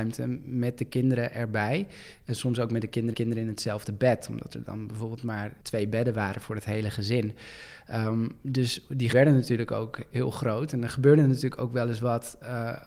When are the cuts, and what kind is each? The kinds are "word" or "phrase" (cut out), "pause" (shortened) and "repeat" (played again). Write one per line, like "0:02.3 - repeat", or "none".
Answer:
0:03.1 - repeat
0:05.6 - pause
0:09.1 - phrase